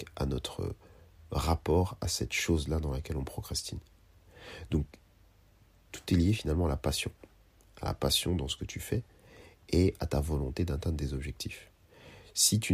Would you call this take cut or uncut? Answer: uncut